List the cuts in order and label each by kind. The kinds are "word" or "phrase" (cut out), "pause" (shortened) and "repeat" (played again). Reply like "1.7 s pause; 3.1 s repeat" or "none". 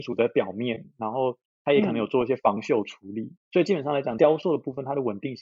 3.4 s pause